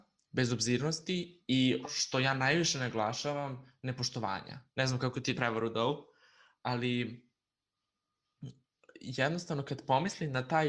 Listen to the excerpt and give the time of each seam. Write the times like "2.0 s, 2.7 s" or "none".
1.8 s, 4.7 s, 5.3 s, 6.6 s